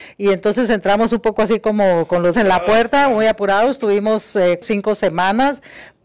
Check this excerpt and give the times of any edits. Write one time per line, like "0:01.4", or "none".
0:02.3
0:04.6